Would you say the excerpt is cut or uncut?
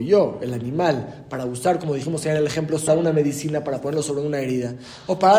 cut